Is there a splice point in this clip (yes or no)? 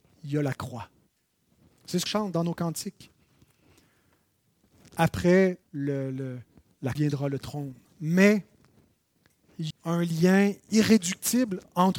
yes